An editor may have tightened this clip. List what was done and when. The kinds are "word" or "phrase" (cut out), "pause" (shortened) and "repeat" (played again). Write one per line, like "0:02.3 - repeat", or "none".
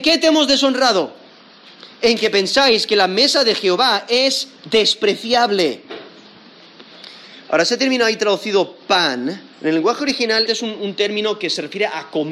0:09.5 - pause
0:10.5 - word